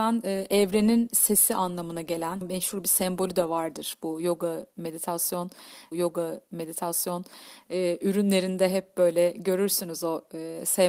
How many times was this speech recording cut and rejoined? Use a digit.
2